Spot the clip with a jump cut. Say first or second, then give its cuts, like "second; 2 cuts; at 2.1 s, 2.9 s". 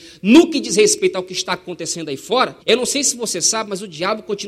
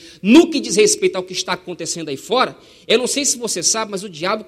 first; 1 cut; at 2.6 s